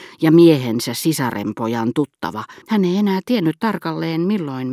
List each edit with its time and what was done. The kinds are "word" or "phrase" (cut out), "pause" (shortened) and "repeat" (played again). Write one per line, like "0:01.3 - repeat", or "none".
0:02.6 - pause